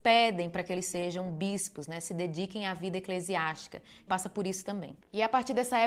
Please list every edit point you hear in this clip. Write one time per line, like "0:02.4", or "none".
0:04.1